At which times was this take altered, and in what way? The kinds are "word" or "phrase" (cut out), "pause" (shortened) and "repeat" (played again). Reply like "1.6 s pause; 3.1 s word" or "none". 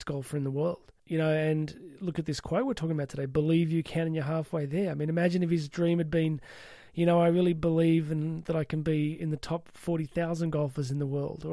1.0 s pause